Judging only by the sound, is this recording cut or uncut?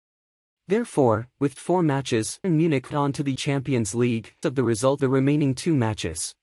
cut